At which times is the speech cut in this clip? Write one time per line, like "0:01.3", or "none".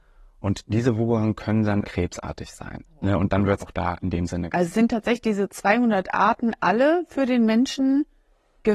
0:01.8
0:02.8
0:03.6

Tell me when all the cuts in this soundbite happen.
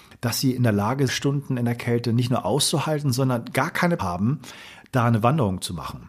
0:01.1
0:04.0

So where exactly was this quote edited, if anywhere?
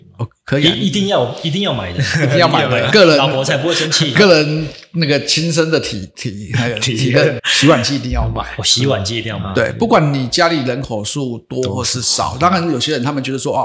0:02.9
0:07.4

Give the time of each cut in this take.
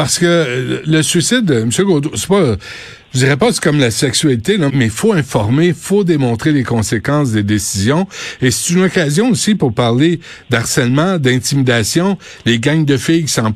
0:04.7

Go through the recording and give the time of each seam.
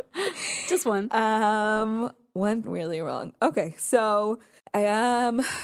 0:02.6
0:04.6

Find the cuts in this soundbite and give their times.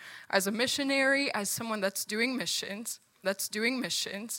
0:03.2

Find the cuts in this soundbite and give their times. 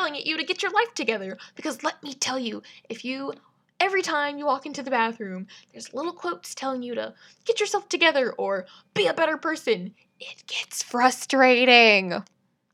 none

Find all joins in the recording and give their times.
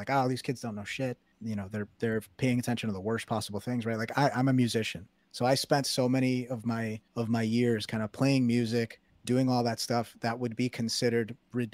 0:01.3
0:07.1
0:09.1

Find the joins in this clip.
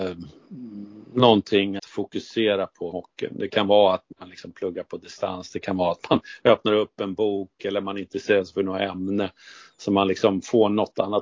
0:01.8
0:02.9

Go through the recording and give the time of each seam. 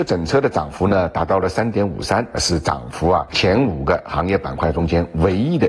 0:02.3

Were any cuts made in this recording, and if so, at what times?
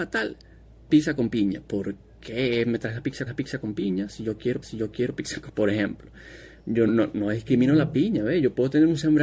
0:03.3
0:04.6
0:05.5
0:06.9

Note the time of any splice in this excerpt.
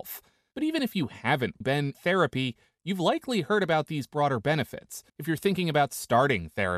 0:01.6
0:01.9
0:05.1

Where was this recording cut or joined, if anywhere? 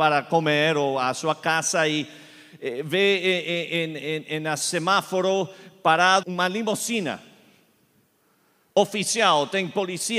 0:06.2

